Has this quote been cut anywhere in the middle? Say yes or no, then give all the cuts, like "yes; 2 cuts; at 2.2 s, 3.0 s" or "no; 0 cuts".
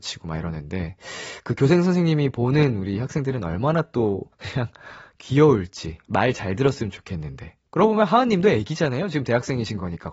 yes; 2 cuts; at 4.3 s, 7.7 s